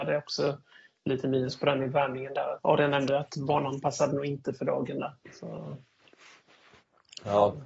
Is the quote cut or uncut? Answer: cut